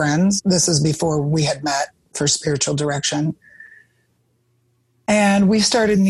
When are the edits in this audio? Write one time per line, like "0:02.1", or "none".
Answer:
none